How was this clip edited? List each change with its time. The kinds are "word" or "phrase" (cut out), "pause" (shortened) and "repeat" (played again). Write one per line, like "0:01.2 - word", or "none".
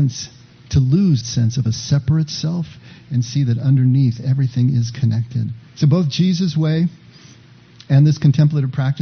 0:01.2 - word
0:05.7 - pause